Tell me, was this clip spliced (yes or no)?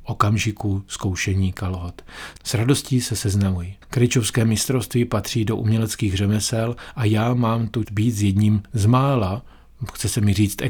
yes